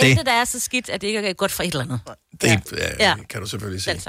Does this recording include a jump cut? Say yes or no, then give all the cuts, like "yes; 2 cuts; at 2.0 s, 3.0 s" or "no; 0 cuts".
no; 0 cuts